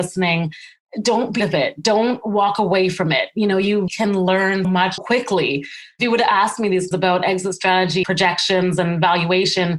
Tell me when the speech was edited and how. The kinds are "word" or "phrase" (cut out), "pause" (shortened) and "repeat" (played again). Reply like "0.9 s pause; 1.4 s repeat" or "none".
1.4 s word; 3.9 s word; 4.6 s word; 5.0 s word; 6.9 s word; 8.0 s word

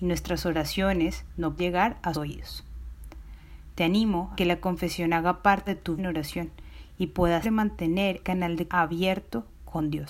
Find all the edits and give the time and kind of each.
1.6 s word; 2.1 s word; 4.3 s word; 5.7 s word; 6.0 s word; 7.4 s word; 8.2 s word; 8.7 s word

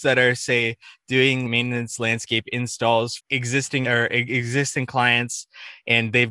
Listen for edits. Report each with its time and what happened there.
1.4 s word; 3.2 s word; 3.8 s word

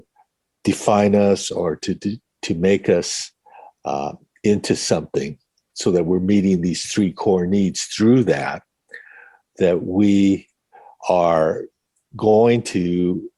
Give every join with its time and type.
none

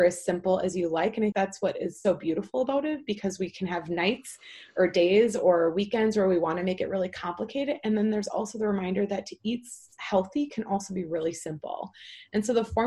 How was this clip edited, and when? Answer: 1.3 s word; 2.0 s word

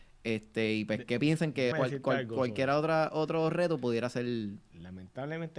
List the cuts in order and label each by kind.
1.7 s word

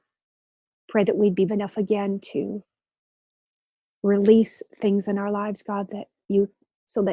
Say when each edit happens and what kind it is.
1.5 s word

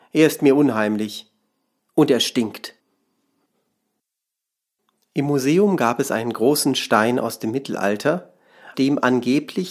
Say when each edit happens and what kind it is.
8.7 s word

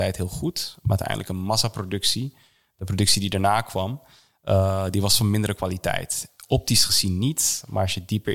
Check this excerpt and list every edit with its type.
none

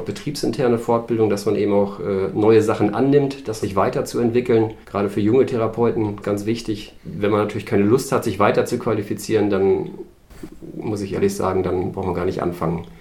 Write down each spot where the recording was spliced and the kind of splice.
3.6 s phrase; 4.8 s pause; 6.2 s word; 7.0 s pause

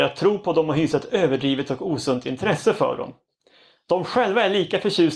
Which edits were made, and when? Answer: none

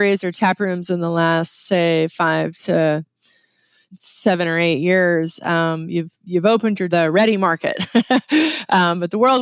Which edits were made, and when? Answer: 6.9 s phrase

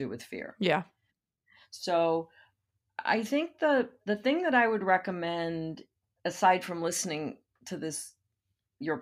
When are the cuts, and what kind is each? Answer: none

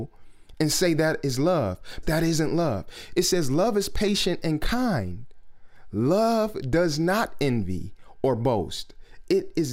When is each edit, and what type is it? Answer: 2.0 s word

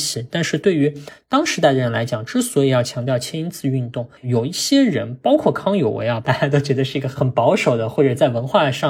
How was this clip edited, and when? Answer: 4.2 s pause

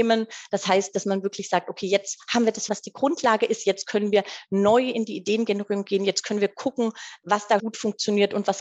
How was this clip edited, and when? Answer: 2.7 s word; 7.6 s word

